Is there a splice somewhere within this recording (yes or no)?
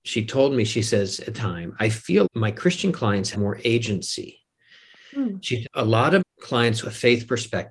yes